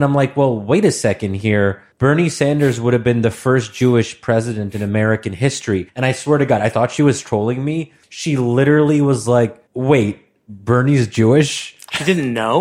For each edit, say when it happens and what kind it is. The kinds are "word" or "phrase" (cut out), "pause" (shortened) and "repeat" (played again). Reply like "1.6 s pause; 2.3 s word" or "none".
1.9 s pause; 5.9 s pause; 8.0 s pause; 9.7 s pause